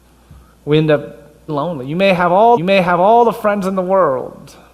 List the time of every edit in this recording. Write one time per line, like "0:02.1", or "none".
0:01.5
0:02.6